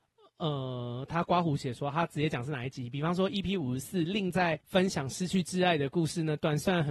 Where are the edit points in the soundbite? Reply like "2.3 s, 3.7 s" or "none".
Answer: 4.6 s